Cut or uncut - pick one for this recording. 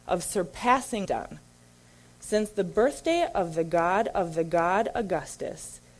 cut